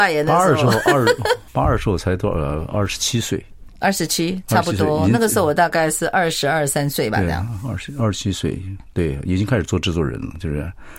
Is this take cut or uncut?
cut